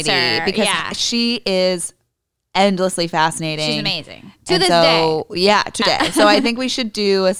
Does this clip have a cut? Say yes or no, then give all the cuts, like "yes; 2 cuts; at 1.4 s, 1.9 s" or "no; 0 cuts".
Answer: yes; 1 cut; at 5.8 s